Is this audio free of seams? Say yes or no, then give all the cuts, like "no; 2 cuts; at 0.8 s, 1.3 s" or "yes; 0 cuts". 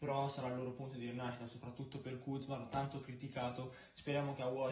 yes; 0 cuts